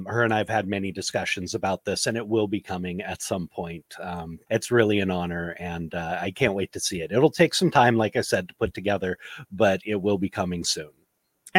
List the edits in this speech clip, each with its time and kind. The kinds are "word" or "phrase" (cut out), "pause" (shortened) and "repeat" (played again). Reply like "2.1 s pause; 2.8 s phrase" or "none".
4.5 s word